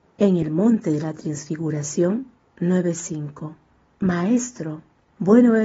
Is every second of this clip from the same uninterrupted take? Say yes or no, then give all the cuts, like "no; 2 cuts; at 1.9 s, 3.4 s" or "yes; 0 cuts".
no; 1 cut; at 2.4 s